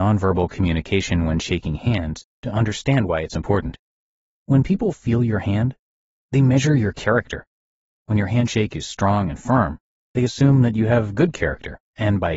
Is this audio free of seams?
yes; 0 cuts

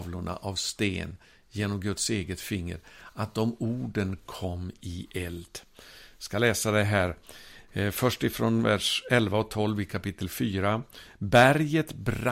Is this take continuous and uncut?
yes; 0 cuts

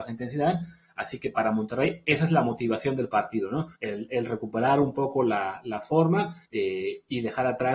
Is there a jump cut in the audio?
yes; 2 cuts; at 3.7 s, 6.4 s

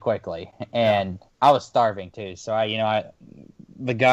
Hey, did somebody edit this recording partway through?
yes; 1 cut; at 1.3 s

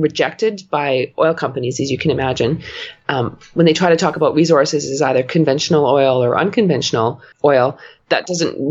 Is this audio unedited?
no; 1 cut; at 7.3 s

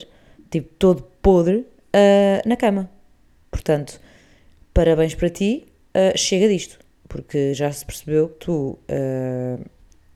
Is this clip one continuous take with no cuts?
yes; 0 cuts

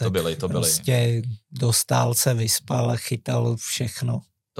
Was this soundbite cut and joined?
no; 0 cuts

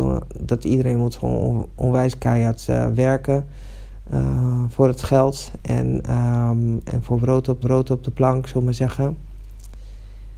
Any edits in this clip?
yes; 1 cut; at 7.6 s

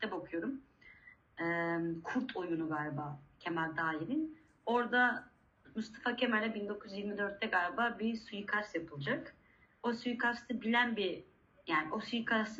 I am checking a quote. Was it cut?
no; 0 cuts

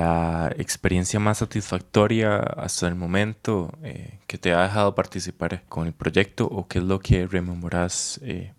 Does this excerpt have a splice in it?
no; 0 cuts

